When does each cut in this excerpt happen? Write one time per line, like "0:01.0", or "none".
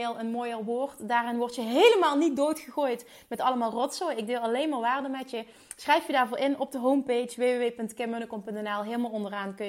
none

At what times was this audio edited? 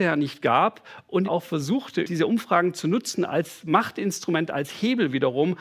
0:01.2

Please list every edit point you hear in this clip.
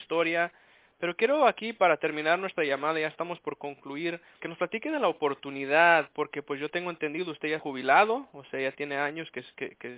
0:04.4
0:07.6

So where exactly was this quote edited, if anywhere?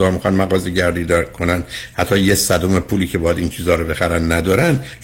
none

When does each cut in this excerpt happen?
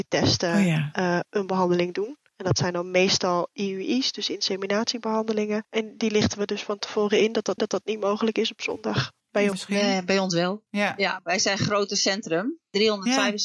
0:07.6
0:09.5
0:10.7

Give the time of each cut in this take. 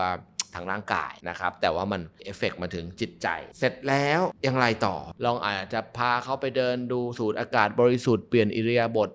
0:01.2

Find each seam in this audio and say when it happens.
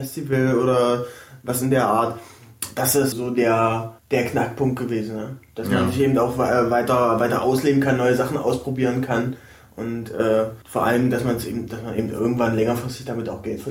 0:03.1
0:04.0
0:10.6

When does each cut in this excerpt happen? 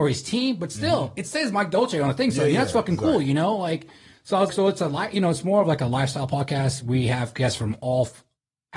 0:04.5

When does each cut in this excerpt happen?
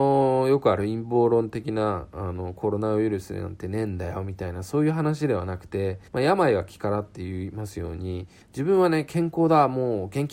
0:06.1
0:08.4

